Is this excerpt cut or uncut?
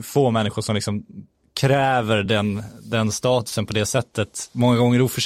uncut